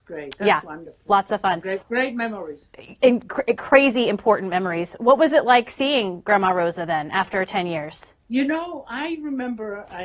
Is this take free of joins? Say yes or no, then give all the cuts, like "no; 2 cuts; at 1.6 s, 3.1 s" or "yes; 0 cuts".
no; 2 cuts; at 1.8 s, 8.2 s